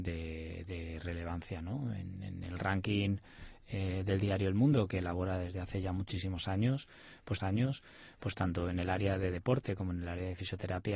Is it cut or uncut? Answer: cut